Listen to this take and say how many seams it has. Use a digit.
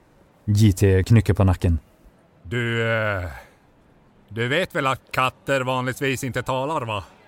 0